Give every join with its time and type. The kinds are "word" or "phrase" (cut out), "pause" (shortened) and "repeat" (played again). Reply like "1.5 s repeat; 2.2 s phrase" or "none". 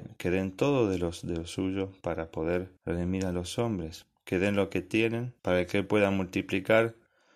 2.8 s pause; 5.4 s pause